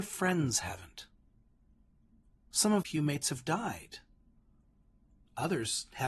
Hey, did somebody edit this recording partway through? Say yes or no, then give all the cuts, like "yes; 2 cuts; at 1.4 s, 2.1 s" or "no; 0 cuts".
yes; 1 cut; at 2.8 s